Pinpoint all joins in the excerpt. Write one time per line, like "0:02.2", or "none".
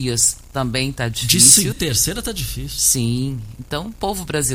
0:01.7